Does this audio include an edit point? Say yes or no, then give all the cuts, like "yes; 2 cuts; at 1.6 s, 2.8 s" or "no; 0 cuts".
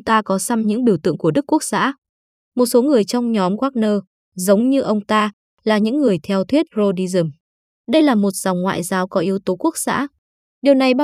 no; 0 cuts